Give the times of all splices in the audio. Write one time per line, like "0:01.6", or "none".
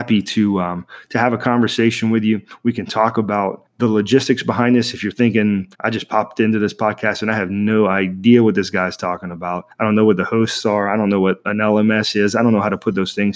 0:03.7
0:05.7
0:09.7